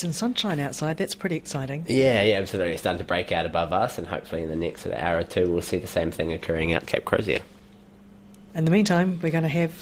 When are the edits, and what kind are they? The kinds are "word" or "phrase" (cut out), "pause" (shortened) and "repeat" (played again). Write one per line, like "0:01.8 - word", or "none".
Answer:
0:06.9 - word